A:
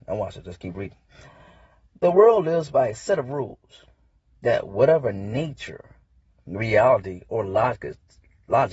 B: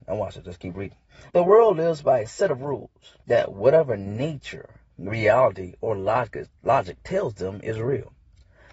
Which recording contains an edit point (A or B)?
B